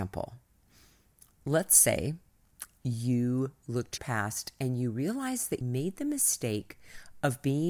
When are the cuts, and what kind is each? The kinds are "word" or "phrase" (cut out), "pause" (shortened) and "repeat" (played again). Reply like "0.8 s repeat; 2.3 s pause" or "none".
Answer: 4.0 s word; 5.6 s word